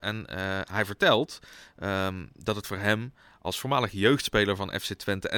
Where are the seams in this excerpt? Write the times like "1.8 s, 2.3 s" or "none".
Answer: none